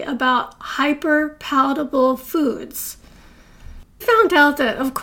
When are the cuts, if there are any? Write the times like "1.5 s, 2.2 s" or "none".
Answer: 4.0 s